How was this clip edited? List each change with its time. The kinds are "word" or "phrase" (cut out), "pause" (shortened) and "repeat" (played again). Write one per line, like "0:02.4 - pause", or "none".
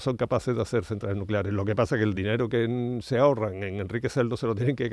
none